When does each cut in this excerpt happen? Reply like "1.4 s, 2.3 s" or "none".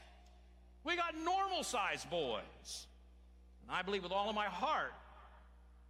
none